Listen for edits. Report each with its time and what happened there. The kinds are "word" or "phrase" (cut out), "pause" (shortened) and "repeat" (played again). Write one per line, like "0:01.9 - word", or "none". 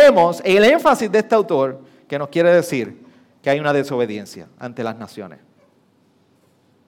none